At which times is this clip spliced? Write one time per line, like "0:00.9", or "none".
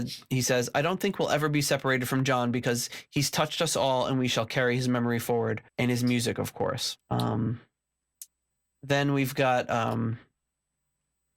0:05.7
0:07.0